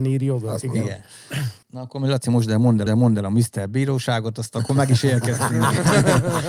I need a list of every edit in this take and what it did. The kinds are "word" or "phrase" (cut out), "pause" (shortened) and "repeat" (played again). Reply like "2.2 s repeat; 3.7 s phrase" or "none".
1.6 s pause; 2.9 s repeat